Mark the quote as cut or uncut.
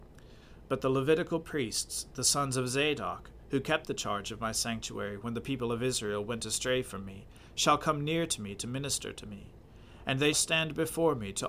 cut